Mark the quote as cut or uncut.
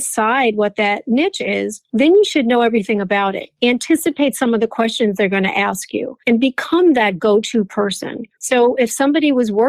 cut